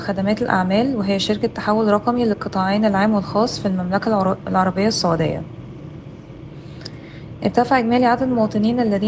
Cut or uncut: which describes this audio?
uncut